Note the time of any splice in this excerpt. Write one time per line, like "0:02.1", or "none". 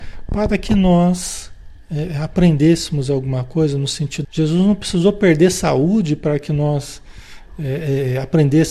0:04.2